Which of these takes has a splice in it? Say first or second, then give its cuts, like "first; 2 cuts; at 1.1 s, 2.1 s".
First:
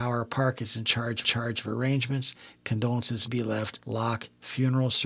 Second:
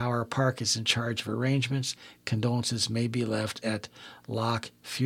first; 3 cuts; at 1.2 s, 3.3 s, 3.8 s